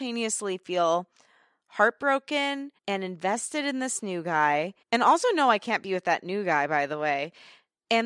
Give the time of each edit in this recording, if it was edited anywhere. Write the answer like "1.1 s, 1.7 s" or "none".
2.8 s, 4.8 s